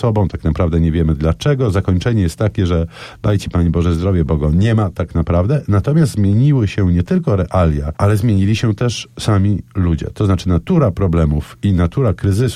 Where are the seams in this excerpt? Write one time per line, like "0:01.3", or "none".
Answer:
none